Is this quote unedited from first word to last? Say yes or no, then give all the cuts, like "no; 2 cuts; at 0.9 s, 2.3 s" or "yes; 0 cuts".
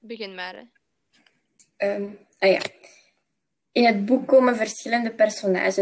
yes; 0 cuts